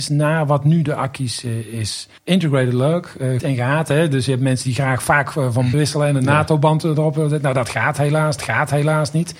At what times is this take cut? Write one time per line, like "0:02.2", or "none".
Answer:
0:02.2
0:03.4
0:05.7
0:08.4